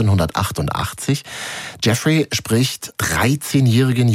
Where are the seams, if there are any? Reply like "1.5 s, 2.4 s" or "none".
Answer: 3.0 s